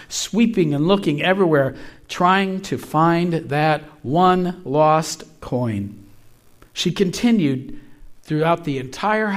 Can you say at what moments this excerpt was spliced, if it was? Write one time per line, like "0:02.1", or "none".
0:06.6